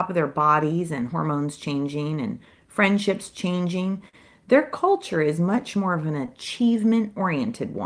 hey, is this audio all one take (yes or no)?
yes